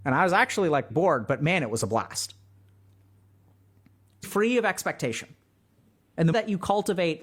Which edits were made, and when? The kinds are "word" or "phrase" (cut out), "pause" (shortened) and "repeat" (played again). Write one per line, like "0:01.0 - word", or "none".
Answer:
0:00.9 - word
0:04.2 - word
0:06.3 - word